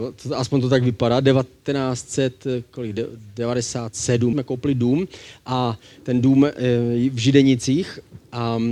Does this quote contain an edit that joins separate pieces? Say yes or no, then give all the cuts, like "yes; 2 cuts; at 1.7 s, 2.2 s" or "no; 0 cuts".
yes; 1 cut; at 4.3 s